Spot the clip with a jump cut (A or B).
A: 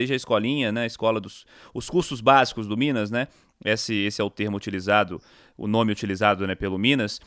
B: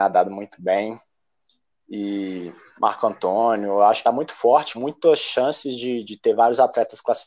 B